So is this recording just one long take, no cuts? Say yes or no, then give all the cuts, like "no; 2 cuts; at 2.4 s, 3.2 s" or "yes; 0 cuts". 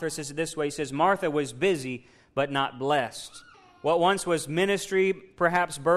no; 1 cut; at 3.5 s